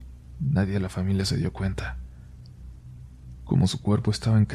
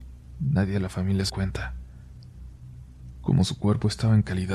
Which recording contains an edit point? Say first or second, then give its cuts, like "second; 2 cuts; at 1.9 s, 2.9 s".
second; 1 cut; at 1.3 s